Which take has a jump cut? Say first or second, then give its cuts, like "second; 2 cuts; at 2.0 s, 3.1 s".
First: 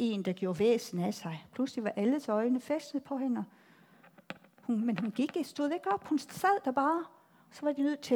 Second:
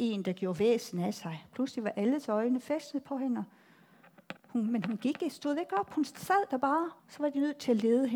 second; 2 cuts; at 4.4 s, 7.0 s